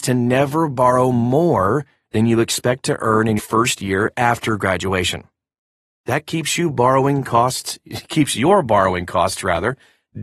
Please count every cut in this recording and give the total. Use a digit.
1